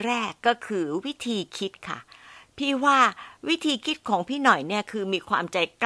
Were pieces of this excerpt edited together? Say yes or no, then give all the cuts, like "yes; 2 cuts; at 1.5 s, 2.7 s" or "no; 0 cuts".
no; 0 cuts